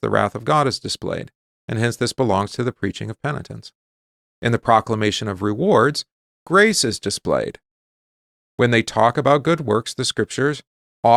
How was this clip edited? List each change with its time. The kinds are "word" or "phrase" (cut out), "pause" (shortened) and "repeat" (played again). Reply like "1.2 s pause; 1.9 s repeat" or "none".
none